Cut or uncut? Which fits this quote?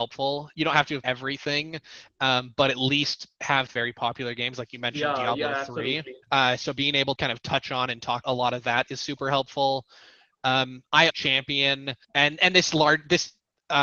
cut